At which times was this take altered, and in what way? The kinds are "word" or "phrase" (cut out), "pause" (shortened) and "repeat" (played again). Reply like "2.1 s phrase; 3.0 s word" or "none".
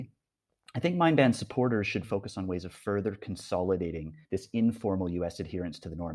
2.0 s word; 4.2 s pause